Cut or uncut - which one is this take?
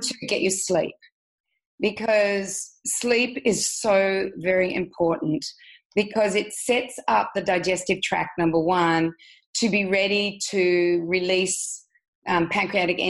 uncut